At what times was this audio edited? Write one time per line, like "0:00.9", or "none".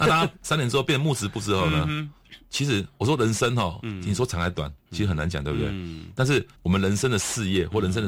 0:04.8
0:06.5